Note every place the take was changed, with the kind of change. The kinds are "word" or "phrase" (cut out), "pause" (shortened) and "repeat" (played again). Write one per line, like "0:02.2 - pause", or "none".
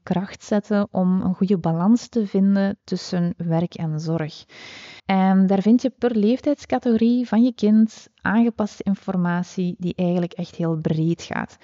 0:05.0 - pause